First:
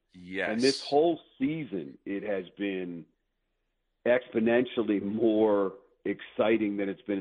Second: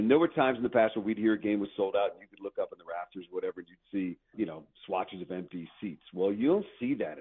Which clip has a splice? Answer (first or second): second